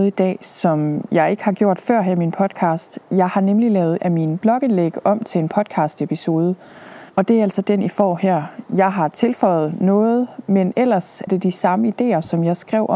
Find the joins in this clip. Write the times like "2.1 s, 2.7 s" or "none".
4.0 s, 7.1 s, 11.3 s

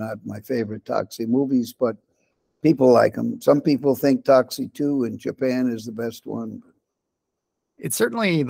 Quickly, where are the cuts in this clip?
none

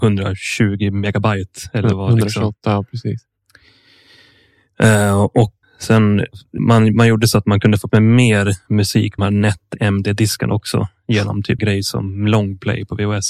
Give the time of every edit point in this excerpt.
5.6 s, 6.6 s, 7.9 s, 9.2 s, 11.6 s

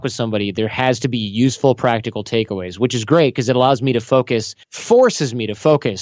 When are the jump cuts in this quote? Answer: 4.6 s

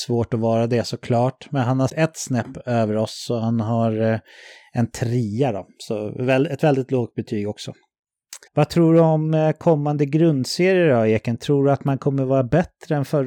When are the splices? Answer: 1.9 s, 8.5 s

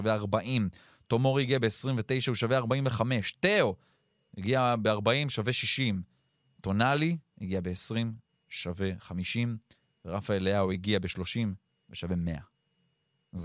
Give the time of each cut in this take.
none

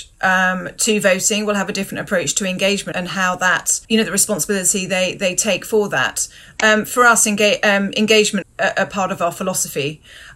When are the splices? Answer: 2.9 s, 3.8 s, 8.4 s

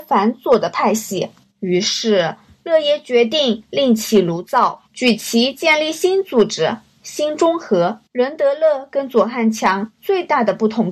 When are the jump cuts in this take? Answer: 1.4 s, 4.9 s, 8.1 s

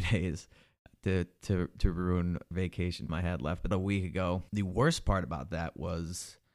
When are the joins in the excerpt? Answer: 2.5 s, 3.1 s, 3.7 s, 4.5 s

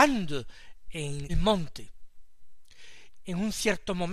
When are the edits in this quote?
1.3 s, 3.2 s

